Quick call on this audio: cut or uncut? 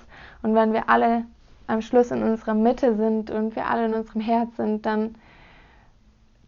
uncut